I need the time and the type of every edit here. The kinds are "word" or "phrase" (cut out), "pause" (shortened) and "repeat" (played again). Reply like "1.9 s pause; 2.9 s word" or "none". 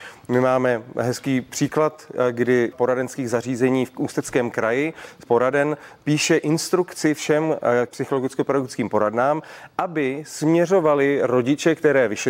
2.7 s word; 5.3 s word; 7.9 s word